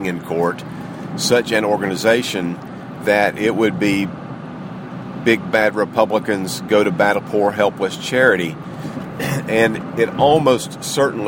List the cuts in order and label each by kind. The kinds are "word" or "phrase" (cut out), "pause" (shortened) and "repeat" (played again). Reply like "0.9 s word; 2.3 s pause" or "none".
7.2 s word